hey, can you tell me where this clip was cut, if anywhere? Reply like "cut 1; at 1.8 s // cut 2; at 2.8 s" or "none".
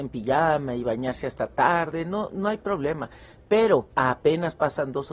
none